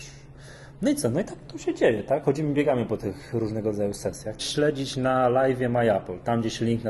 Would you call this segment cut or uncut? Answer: cut